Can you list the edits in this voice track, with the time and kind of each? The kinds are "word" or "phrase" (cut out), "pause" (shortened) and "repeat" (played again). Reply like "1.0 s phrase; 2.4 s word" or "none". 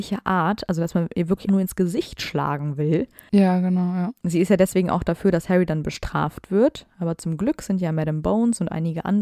1.5 s word